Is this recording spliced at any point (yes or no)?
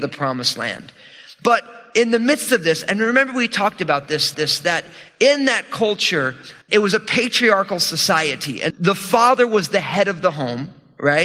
yes